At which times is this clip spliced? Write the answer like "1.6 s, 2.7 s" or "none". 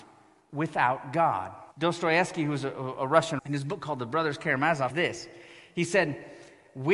1.7 s, 3.4 s, 4.9 s